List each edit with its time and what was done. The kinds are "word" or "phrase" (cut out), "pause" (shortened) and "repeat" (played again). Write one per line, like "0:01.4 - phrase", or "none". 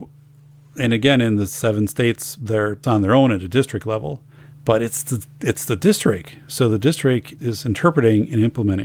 0:02.8 - phrase
0:04.4 - pause
0:07.4 - word